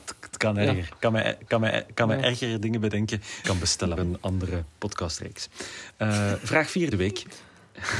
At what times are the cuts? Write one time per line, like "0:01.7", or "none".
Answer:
0:01.5
0:03.4
0:04.0
0:06.9